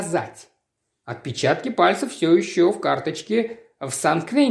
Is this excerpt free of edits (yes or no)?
yes